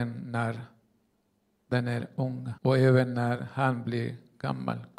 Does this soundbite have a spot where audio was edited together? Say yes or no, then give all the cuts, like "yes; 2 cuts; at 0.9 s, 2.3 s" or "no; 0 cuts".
yes; 1 cut; at 2.6 s